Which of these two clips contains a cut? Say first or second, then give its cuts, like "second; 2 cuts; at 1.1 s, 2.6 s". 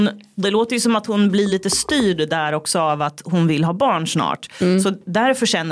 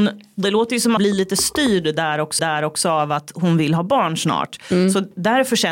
second; 2 cuts; at 1.0 s, 2.4 s